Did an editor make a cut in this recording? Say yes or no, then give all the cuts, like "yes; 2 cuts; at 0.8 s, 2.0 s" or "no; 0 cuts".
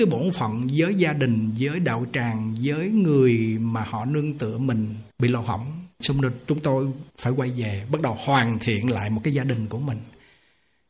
yes; 3 cuts; at 5.1 s, 5.9 s, 7.1 s